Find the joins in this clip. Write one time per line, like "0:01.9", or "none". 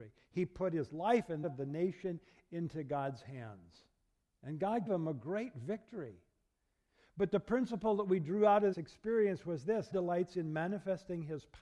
0:01.4
0:04.9
0:08.7
0:09.9